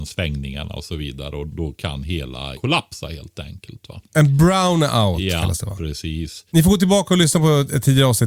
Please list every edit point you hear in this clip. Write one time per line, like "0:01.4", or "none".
0:01.5
0:02.5
0:04.1
0:06.5